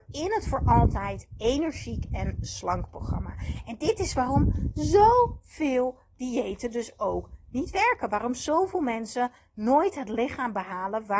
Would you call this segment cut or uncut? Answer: uncut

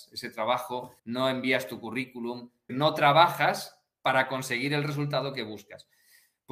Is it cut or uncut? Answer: cut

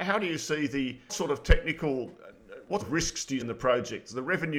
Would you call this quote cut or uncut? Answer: cut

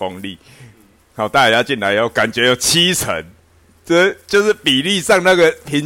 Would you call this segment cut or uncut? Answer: uncut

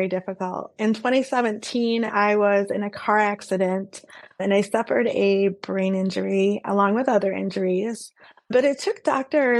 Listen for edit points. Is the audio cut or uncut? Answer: uncut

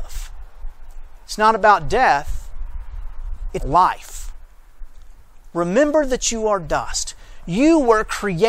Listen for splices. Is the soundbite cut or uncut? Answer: cut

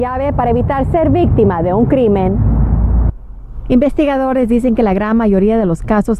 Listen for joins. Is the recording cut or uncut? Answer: uncut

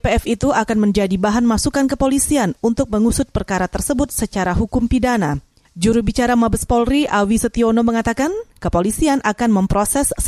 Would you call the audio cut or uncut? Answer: uncut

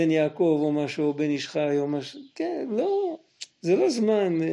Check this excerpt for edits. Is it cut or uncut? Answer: cut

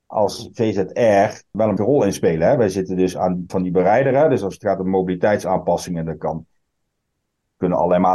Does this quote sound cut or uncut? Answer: cut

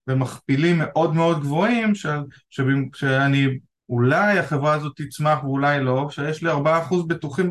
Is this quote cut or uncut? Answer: cut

